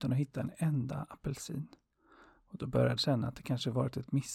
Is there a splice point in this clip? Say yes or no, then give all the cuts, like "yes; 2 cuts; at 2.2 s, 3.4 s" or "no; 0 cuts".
yes; 1 cut; at 3.0 s